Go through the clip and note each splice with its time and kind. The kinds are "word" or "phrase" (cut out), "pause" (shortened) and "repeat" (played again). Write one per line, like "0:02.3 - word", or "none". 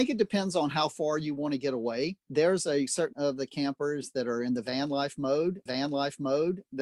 0:02.2 - pause
0:03.1 - word
0:05.7 - repeat